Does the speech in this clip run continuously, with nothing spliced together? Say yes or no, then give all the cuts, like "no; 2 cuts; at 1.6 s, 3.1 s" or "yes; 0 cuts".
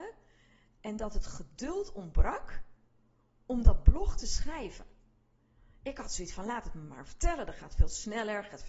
yes; 0 cuts